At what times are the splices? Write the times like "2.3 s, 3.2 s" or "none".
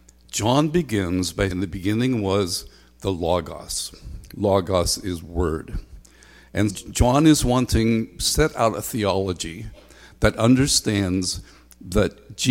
1.5 s, 6.7 s, 8.2 s